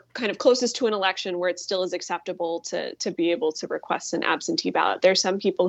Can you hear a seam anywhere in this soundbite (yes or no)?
no